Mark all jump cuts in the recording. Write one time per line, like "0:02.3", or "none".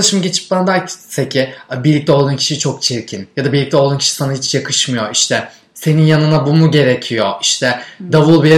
none